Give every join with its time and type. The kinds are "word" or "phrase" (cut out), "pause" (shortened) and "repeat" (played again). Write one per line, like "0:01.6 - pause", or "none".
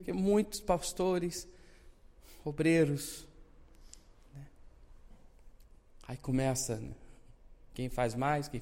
none